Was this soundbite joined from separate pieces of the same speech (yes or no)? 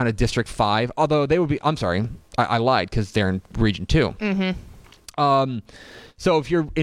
no